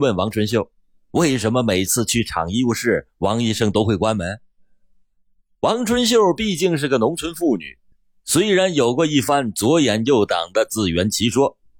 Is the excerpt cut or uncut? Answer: uncut